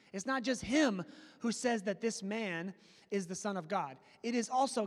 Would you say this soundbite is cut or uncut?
uncut